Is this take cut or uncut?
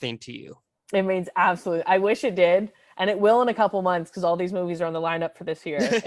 uncut